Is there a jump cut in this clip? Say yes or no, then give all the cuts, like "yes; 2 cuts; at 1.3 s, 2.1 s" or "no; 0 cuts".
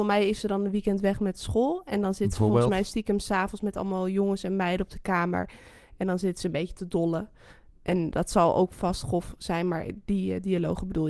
no; 0 cuts